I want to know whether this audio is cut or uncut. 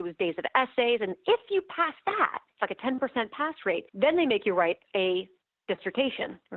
cut